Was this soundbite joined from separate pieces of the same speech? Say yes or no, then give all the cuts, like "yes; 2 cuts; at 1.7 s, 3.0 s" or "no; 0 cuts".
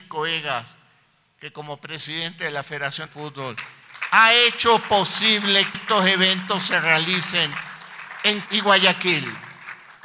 yes; 3 cuts; at 3.1 s, 5.7 s, 8.5 s